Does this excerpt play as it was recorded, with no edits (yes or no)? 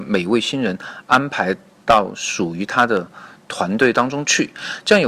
yes